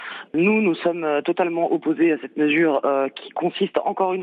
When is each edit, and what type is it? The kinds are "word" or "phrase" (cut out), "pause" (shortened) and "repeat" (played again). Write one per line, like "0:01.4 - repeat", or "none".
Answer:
none